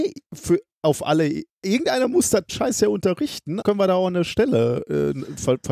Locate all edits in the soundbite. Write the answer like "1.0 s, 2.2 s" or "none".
2.5 s, 3.6 s